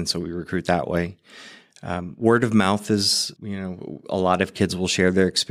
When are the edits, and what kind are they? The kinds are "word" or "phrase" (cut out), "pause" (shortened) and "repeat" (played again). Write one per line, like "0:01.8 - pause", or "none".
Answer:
0:03.4 - word